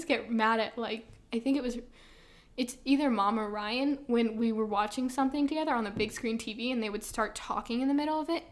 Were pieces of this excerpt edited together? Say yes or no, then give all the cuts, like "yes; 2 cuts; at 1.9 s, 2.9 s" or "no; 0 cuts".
no; 0 cuts